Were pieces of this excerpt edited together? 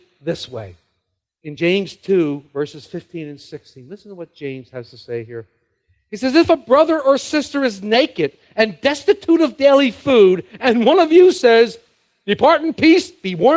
no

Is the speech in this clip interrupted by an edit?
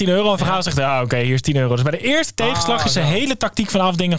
no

